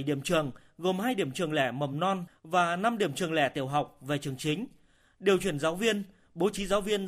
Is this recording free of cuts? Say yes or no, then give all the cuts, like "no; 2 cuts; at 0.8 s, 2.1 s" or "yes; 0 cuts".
yes; 0 cuts